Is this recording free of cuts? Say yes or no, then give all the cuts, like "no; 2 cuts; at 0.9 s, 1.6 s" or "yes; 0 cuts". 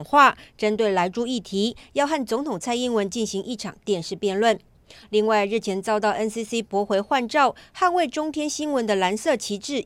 yes; 0 cuts